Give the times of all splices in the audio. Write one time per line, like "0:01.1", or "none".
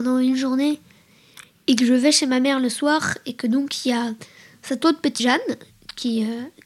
0:05.2